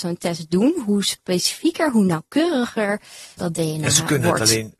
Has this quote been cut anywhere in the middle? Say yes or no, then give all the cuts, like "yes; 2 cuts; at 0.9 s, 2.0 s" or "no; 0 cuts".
yes; 1 cut; at 3.4 s